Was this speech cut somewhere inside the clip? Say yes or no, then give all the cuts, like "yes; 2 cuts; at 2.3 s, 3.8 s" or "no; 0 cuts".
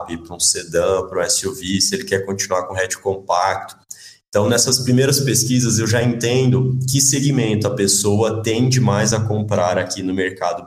no; 0 cuts